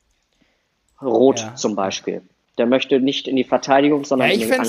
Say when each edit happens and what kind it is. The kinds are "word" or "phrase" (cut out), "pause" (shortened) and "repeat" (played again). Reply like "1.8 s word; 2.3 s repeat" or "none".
none